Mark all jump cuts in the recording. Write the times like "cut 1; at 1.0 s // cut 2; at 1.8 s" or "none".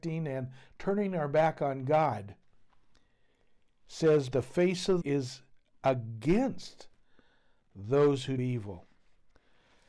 cut 1; at 4.3 s // cut 2; at 5.0 s // cut 3; at 8.4 s